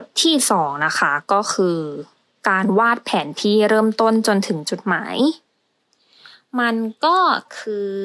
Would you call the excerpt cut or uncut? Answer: uncut